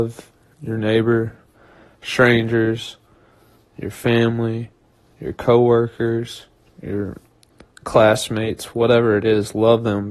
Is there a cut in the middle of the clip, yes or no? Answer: no